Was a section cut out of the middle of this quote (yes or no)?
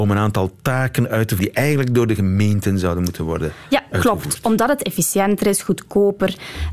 yes